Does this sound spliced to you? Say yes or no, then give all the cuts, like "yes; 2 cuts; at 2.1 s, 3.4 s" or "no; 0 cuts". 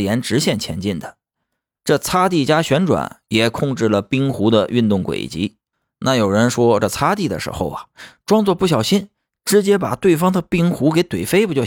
no; 0 cuts